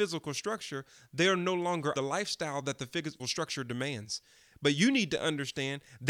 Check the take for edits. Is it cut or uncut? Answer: cut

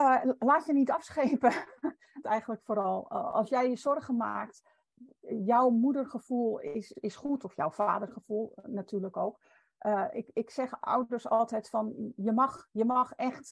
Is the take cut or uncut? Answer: cut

